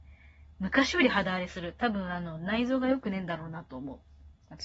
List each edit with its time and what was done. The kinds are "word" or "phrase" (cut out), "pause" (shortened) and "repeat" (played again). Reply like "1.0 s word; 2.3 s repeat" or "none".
none